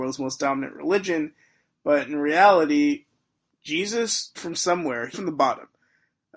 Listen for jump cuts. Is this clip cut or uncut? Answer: cut